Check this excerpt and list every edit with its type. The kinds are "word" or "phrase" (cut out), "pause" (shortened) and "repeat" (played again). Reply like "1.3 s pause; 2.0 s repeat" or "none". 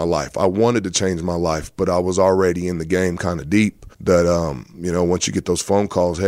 3.9 s pause